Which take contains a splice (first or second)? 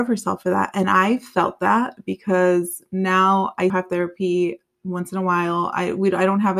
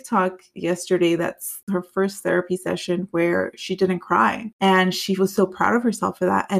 first